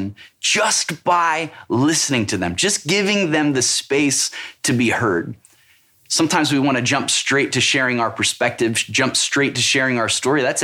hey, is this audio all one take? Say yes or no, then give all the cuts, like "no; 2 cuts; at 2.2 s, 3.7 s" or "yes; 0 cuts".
yes; 0 cuts